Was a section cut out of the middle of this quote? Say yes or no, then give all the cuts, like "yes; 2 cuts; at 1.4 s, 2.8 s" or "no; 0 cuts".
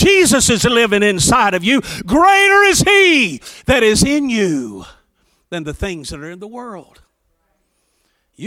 no; 0 cuts